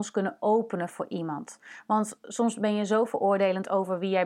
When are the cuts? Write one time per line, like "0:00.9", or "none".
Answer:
none